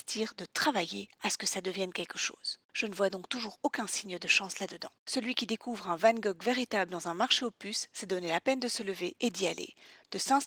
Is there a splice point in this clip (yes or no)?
yes